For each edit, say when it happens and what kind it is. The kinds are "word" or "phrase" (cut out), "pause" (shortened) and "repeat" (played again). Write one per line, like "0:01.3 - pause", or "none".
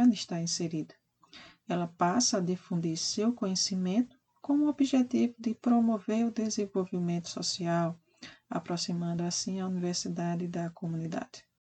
none

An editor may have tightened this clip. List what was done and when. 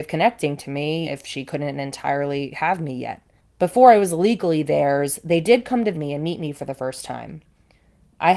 0:01.0 - word
0:03.4 - pause
0:05.9 - word

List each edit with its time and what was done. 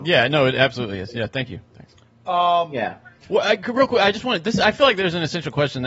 none

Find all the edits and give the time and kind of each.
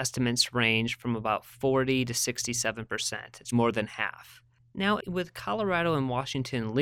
0:03.5 - word

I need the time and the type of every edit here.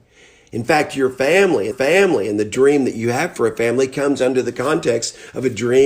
0:01.7 - repeat

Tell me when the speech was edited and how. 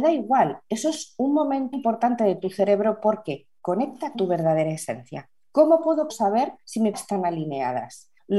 0:01.7 - word
0:04.1 - word
0:06.1 - phrase
0:06.9 - phrase

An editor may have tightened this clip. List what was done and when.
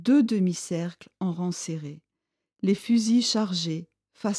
none

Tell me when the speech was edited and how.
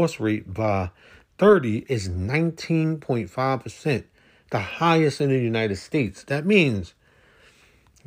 none

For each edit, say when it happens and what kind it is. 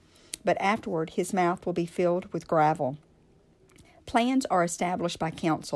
none

